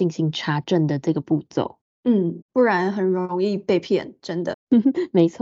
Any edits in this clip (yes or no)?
yes